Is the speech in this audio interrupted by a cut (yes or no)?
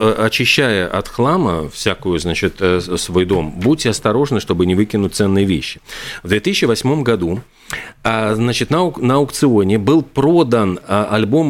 no